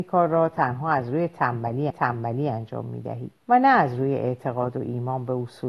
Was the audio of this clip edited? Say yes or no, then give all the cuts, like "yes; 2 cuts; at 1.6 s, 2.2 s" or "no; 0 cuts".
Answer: yes; 2 cuts; at 1.9 s, 3.4 s